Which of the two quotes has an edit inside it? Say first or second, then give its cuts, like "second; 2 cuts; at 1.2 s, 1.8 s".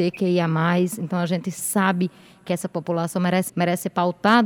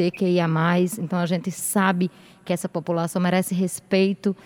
first; 1 cut; at 3.5 s